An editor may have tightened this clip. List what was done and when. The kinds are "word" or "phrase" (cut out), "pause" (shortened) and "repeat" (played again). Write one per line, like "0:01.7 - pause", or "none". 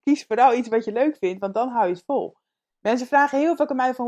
none